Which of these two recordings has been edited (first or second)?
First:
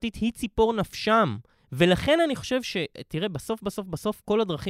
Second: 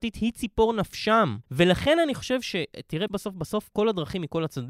second